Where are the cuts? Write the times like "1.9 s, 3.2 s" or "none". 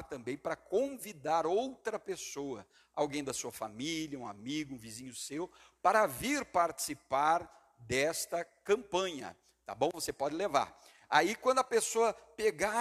none